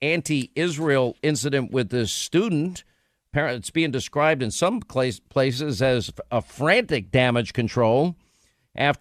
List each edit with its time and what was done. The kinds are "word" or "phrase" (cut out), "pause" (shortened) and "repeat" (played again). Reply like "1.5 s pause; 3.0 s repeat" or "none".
none